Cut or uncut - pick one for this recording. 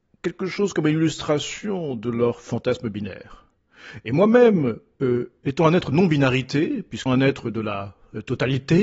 cut